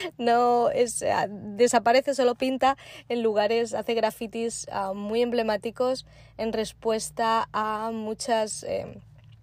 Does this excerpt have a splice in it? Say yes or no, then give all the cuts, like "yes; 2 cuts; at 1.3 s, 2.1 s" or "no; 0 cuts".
no; 0 cuts